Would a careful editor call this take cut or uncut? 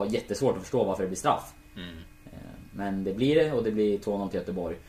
uncut